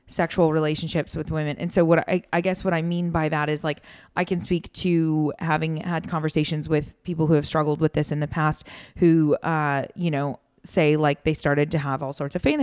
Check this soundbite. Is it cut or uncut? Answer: uncut